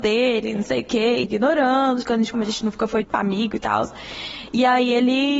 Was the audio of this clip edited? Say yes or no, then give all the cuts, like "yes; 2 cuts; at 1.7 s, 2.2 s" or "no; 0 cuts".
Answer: yes; 4 cuts; at 1.2 s, 2.0 s, 2.3 s, 3.0 s